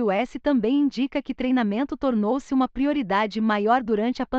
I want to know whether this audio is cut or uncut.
uncut